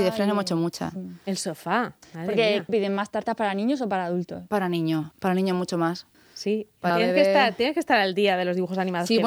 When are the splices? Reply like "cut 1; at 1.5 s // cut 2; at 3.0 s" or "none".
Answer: cut 1; at 2.7 s // cut 2; at 5.1 s // cut 3; at 6.1 s // cut 4; at 6.9 s